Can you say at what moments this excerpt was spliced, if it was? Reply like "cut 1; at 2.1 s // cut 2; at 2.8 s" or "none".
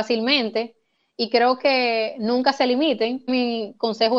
none